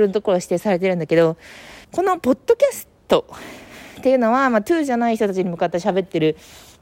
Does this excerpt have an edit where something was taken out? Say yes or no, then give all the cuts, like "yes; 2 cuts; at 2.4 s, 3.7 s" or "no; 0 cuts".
yes; 1 cut; at 1.8 s